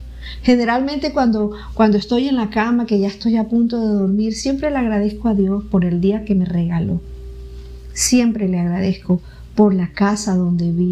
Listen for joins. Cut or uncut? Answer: uncut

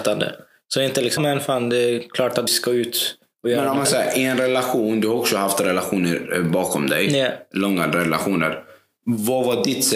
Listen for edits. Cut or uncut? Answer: cut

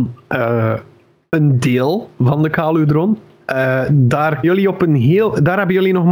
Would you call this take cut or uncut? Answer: cut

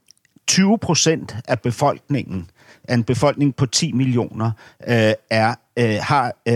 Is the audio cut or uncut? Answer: uncut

